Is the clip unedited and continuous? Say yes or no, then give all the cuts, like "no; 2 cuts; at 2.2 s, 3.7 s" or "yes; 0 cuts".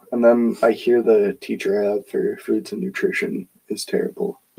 yes; 0 cuts